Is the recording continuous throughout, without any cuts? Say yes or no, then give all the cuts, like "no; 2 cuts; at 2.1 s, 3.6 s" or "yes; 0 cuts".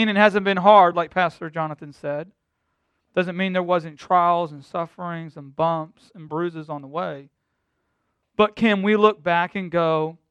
yes; 0 cuts